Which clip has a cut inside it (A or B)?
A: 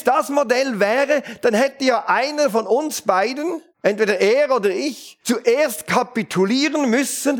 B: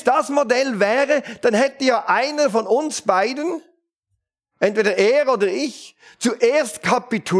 A